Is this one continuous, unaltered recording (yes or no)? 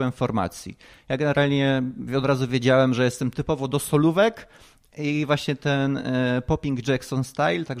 yes